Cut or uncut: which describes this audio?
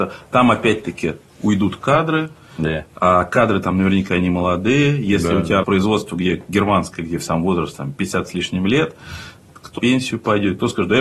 cut